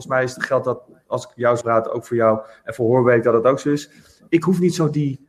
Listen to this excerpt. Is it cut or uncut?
cut